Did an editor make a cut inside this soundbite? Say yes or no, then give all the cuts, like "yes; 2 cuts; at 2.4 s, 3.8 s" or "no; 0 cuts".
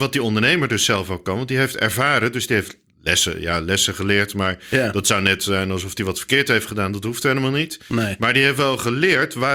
no; 0 cuts